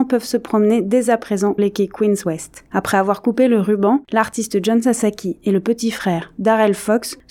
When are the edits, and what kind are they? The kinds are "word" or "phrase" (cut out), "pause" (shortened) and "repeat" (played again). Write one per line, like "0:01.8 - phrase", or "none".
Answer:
0:01.6 - word